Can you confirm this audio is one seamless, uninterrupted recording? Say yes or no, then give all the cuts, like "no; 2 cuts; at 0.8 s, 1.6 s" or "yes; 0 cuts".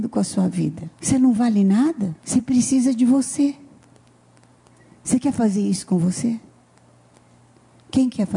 no; 2 cuts; at 0.9 s, 2.2 s